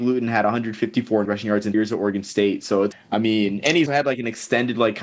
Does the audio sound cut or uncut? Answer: cut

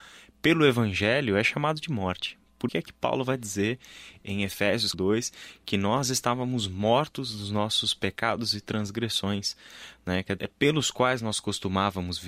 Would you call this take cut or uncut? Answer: cut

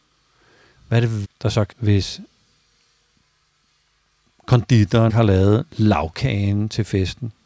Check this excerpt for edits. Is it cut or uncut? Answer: cut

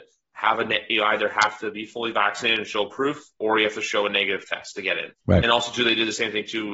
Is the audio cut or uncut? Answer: cut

